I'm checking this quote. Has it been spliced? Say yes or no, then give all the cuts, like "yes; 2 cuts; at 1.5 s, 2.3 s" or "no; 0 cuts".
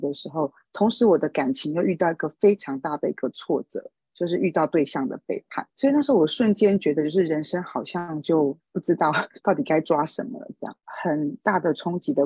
yes; 2 cuts; at 5.7 s, 8.6 s